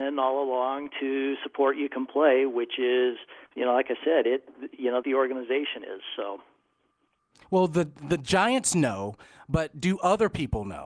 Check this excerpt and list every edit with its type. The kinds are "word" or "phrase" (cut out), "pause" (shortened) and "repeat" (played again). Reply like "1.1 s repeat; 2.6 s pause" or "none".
3.5 s pause; 5.0 s phrase